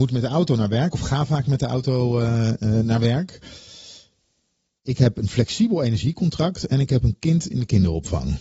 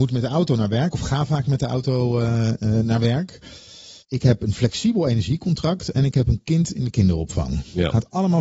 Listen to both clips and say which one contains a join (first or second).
second